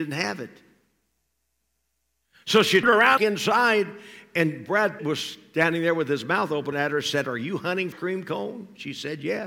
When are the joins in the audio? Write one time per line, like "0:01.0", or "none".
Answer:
0:02.8
0:03.2
0:05.0
0:06.7
0:07.9